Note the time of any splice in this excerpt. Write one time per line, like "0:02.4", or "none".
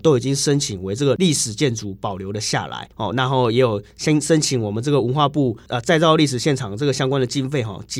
0:02.9